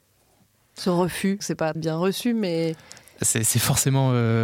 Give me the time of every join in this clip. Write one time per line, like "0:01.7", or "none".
0:01.4
0:01.7